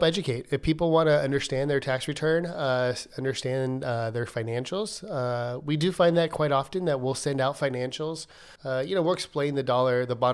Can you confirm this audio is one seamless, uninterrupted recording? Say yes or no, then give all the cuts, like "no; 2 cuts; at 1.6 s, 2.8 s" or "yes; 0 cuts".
no; 1 cut; at 8.6 s